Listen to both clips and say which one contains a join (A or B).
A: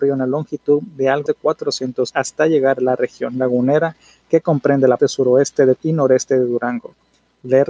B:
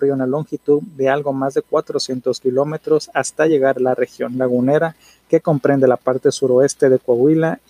A